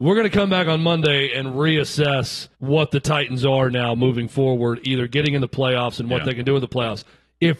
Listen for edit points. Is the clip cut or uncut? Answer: cut